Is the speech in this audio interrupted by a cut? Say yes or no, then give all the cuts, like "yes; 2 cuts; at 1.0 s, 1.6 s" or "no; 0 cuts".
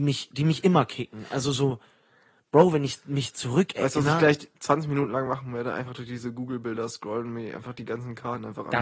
no; 0 cuts